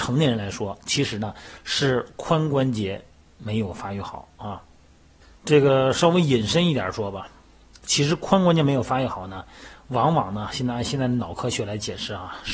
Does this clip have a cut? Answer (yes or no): no